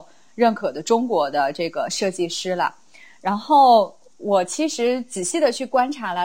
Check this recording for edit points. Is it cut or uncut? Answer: uncut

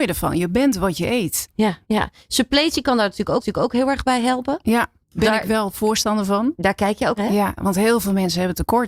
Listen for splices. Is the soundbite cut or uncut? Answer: cut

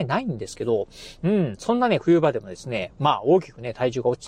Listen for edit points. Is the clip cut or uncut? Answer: uncut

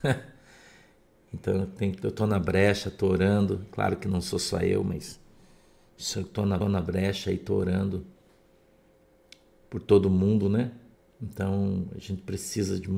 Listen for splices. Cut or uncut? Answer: cut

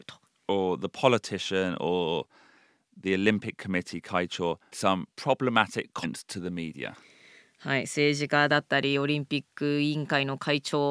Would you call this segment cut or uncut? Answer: cut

